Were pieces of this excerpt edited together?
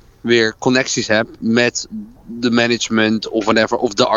no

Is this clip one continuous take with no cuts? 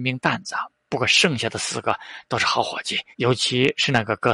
no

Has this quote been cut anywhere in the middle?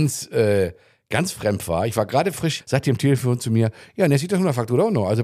yes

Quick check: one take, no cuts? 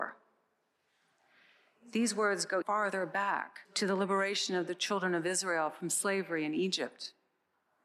no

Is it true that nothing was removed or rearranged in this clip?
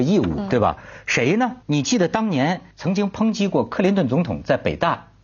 no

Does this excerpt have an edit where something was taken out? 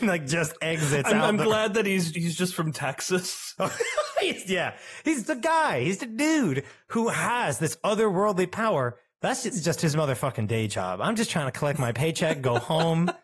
yes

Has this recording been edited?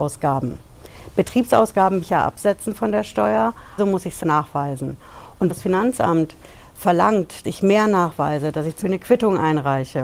yes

